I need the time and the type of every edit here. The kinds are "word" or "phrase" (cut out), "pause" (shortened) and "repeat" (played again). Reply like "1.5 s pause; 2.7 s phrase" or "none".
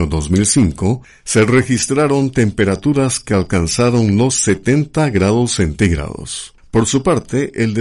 none